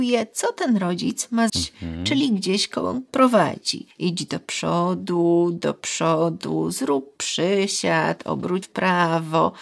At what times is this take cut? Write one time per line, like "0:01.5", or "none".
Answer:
0:01.5
0:03.9
0:08.6